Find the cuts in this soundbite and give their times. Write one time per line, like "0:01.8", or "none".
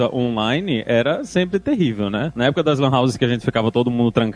none